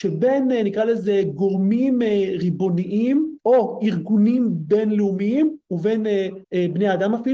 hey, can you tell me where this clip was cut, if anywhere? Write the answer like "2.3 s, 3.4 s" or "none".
3.4 s, 6.4 s